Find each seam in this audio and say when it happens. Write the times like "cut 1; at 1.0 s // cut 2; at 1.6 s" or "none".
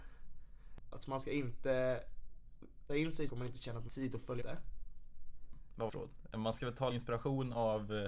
cut 1; at 2.9 s // cut 2; at 3.3 s // cut 3; at 3.9 s // cut 4; at 4.4 s // cut 5; at 5.9 s // cut 6; at 6.9 s